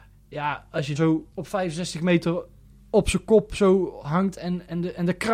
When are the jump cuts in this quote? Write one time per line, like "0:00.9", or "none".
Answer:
0:01.0
0:01.3